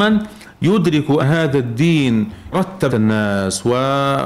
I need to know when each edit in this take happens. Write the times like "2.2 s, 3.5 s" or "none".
1.2 s, 2.5 s, 2.9 s